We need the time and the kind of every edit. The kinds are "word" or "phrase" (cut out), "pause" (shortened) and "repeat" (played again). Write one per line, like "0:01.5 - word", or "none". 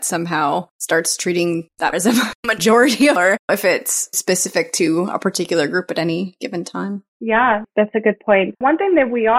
0:01.9 - word
0:03.2 - phrase
0:04.1 - word
0:07.1 - pause